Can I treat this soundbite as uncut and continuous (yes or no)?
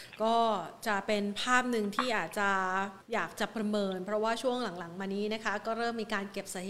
no